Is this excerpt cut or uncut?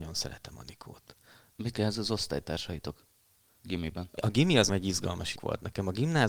cut